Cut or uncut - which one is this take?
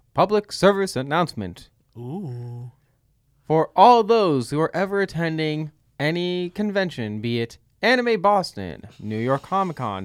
uncut